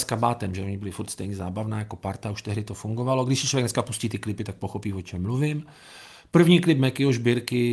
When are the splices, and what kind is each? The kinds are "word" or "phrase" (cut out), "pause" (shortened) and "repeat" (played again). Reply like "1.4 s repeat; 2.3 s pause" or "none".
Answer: none